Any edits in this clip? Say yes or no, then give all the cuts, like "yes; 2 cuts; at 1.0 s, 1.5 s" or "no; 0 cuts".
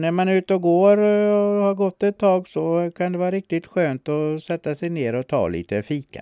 no; 0 cuts